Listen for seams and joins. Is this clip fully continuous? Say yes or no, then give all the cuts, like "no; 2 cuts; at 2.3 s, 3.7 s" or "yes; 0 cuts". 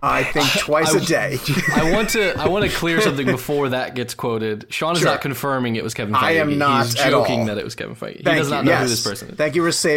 yes; 0 cuts